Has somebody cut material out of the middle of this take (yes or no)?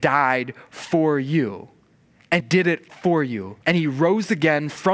yes